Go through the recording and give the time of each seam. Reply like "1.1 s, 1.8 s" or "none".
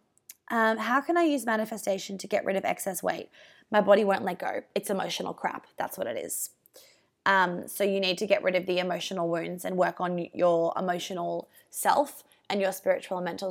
none